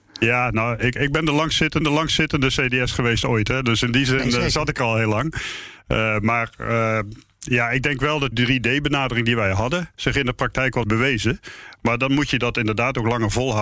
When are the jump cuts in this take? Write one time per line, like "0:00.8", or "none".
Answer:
0:01.8
0:08.3
0:09.9
0:10.8